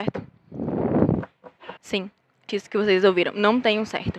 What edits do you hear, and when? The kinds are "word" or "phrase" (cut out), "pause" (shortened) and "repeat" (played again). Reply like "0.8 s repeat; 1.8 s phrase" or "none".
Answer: 1.8 s pause; 2.5 s word